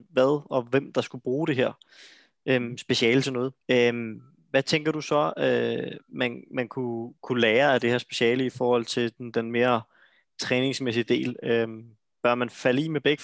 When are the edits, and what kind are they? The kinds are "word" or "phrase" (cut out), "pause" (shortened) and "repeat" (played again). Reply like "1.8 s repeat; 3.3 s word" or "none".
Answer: 3.6 s pause

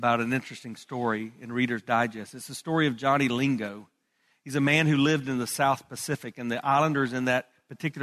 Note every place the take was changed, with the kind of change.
none

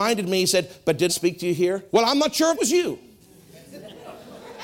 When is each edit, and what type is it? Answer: 1.1 s word; 1.9 s pause; 2.5 s phrase

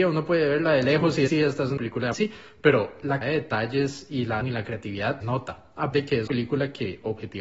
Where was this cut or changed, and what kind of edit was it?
1.3 s word; 1.8 s phrase; 2.1 s word; 3.2 s word; 4.4 s word; 5.2 s word; 5.9 s word; 6.3 s word

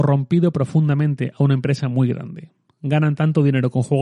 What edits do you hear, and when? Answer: none

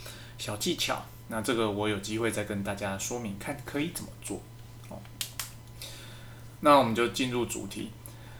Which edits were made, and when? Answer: 6.6 s word

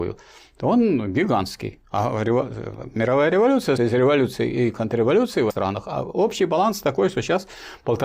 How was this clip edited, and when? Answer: 3.8 s word; 5.5 s word

